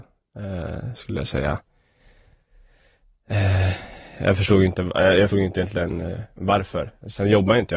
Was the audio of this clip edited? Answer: yes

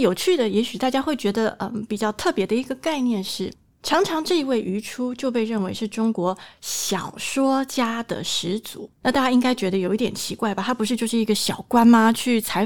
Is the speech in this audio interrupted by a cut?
yes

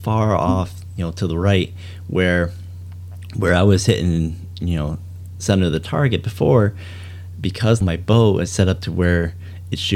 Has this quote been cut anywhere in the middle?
yes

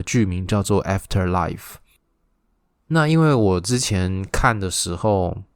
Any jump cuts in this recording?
no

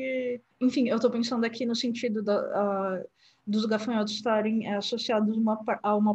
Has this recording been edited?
no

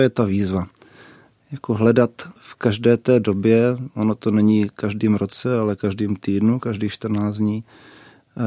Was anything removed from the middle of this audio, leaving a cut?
yes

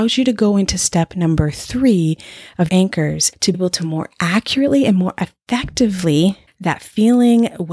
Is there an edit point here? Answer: yes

